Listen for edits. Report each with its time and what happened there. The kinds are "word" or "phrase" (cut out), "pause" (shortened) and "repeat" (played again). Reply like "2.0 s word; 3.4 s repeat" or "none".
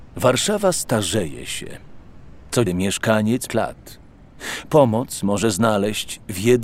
2.7 s word; 3.5 s phrase